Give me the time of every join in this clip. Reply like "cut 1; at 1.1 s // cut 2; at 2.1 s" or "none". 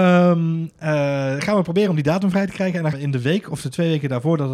cut 1; at 2.9 s

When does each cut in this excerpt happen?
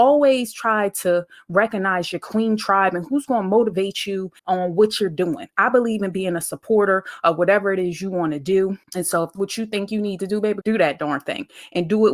cut 1; at 4.4 s // cut 2; at 8.8 s // cut 3; at 9.3 s // cut 4; at 10.6 s

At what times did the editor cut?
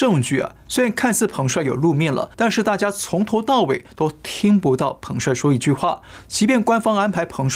cut 1; at 2.3 s

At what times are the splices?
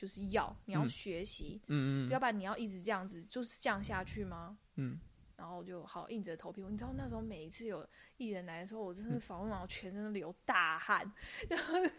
cut 1; at 5.3 s

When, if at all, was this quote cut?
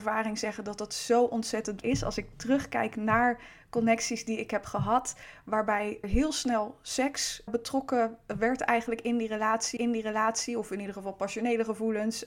cut 1; at 1.8 s // cut 2; at 6.0 s // cut 3; at 7.5 s // cut 4; at 9.8 s

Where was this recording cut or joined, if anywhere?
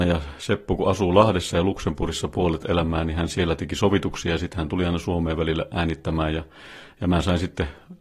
none

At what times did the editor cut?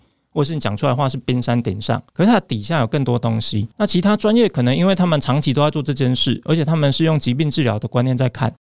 cut 1; at 2.1 s // cut 2; at 3.7 s

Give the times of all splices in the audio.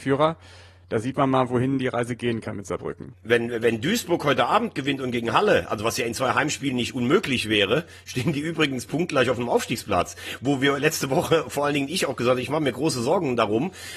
none

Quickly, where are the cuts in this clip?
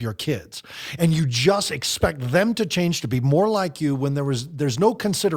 none

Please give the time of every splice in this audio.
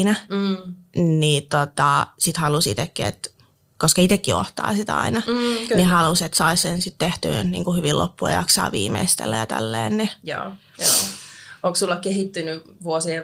none

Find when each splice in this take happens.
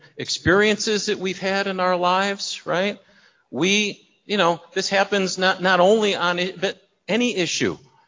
none

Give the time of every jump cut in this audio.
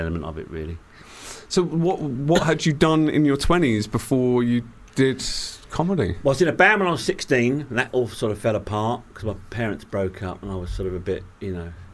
cut 1; at 4.9 s

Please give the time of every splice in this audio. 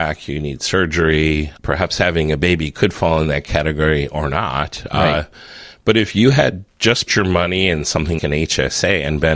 cut 1; at 7.1 s // cut 2; at 8.2 s

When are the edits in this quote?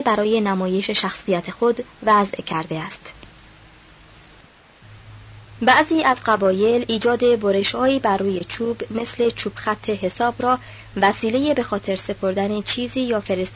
none

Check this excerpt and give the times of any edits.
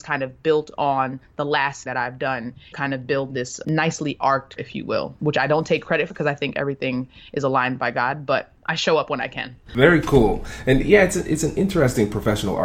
cut 1; at 1.9 s // cut 2; at 2.7 s // cut 3; at 3.6 s // cut 4; at 4.6 s // cut 5; at 5.2 s // cut 6; at 6.1 s

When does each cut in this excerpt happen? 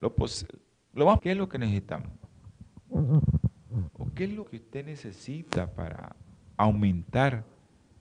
cut 1; at 1.2 s // cut 2; at 4.4 s

